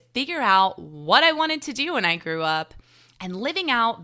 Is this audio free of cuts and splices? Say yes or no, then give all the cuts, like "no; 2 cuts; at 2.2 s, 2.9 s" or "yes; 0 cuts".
yes; 0 cuts